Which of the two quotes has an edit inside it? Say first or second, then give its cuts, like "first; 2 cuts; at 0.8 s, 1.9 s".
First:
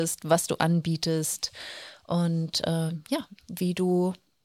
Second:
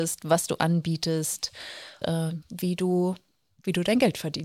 second; 2 cuts; at 2.0 s, 2.4 s